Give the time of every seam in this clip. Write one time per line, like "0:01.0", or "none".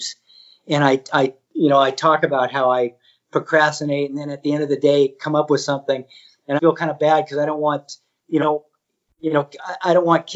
0:01.4
0:06.6
0:08.4